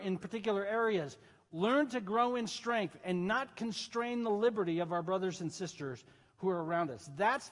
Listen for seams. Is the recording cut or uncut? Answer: uncut